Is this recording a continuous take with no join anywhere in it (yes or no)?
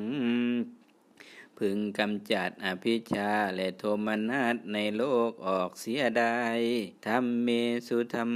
no